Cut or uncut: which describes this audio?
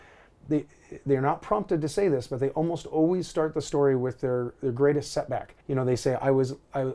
cut